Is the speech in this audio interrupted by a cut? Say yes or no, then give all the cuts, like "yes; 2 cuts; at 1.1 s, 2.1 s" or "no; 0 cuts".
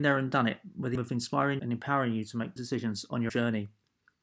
yes; 4 cuts; at 1.0 s, 1.6 s, 2.6 s, 3.3 s